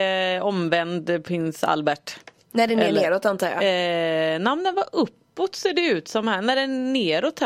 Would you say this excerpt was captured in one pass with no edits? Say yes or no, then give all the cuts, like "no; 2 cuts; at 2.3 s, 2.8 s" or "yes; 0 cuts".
yes; 0 cuts